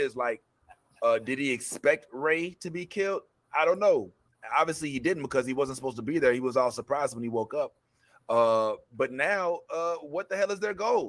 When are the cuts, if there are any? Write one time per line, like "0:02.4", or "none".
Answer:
none